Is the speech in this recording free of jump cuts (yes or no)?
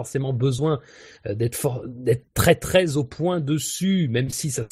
yes